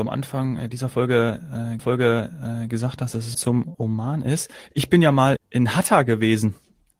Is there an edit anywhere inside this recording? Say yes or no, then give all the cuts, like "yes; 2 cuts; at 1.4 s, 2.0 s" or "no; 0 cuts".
yes; 4 cuts; at 1.8 s, 3.3 s, 3.7 s, 5.4 s